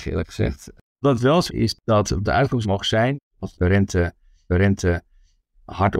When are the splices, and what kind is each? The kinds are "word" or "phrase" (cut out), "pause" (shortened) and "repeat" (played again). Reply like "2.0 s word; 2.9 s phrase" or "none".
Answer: 1.5 s phrase; 2.2 s word; 2.6 s word; 3.3 s pause; 4.5 s repeat